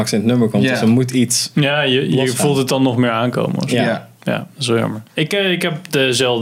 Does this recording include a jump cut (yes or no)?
no